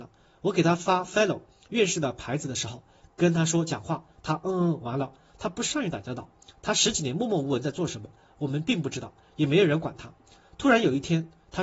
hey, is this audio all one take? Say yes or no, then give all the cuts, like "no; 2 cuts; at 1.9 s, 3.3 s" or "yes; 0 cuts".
yes; 0 cuts